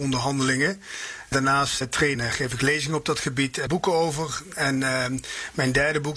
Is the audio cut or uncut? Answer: cut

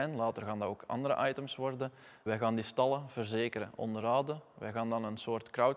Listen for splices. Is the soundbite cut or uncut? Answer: cut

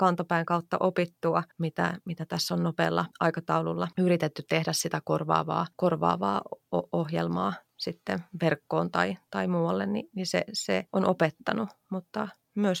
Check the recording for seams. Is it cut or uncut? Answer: cut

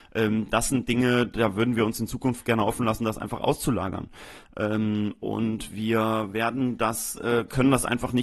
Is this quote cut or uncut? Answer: uncut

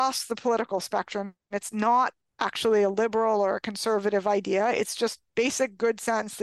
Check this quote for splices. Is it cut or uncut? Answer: uncut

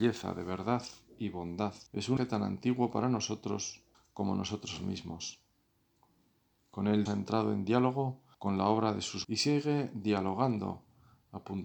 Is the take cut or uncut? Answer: cut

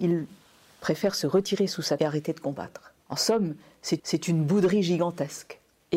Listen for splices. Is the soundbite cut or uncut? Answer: cut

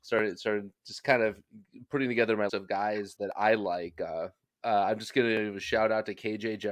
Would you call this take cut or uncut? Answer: cut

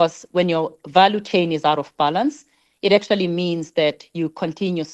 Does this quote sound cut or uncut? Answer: uncut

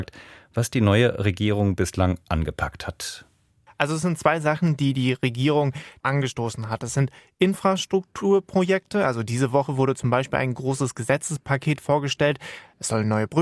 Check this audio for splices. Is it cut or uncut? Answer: uncut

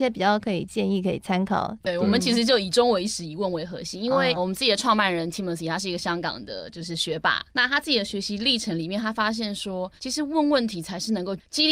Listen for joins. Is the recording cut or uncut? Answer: cut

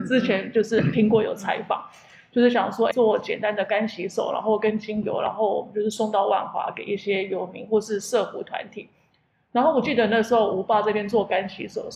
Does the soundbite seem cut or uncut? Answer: cut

